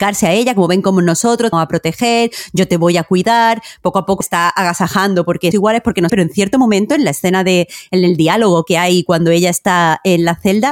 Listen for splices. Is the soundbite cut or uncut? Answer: cut